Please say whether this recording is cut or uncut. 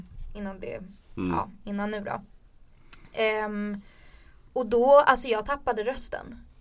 uncut